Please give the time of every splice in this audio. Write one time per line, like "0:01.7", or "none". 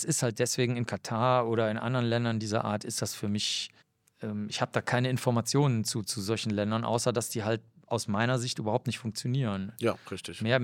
0:03.8